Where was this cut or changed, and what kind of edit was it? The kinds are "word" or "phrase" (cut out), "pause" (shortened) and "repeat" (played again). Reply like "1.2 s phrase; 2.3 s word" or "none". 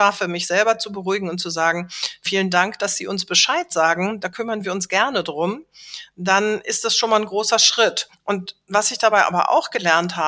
8.1 s pause